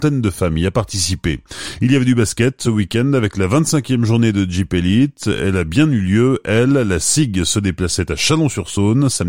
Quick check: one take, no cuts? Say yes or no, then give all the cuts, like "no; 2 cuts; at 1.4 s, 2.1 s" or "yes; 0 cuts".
no; 1 cut; at 2.6 s